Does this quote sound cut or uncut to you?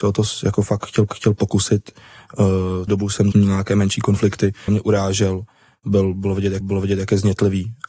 cut